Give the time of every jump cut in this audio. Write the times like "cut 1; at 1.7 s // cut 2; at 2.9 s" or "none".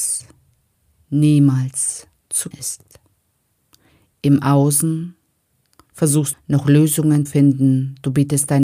cut 1; at 2.5 s // cut 2; at 6.3 s // cut 3; at 7.3 s